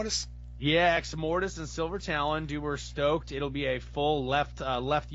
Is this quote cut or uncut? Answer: uncut